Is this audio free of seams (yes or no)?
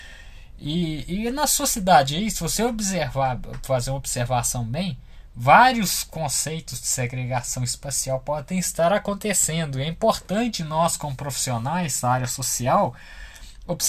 yes